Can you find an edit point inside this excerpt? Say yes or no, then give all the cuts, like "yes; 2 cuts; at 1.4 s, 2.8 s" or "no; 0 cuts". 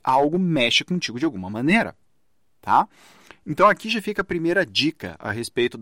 no; 0 cuts